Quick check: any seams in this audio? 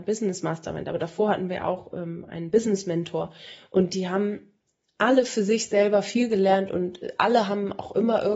no; 0 cuts

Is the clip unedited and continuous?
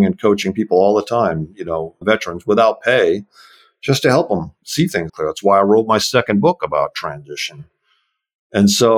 no; 2 cuts; at 2.0 s, 5.1 s

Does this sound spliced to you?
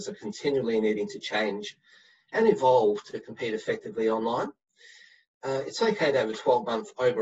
no; 0 cuts

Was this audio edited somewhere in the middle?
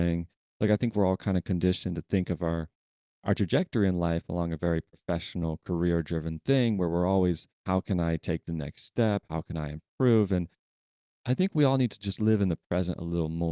no; 0 cuts

